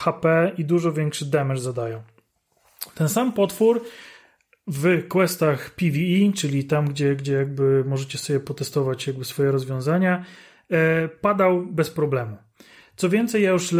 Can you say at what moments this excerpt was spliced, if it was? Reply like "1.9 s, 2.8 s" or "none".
none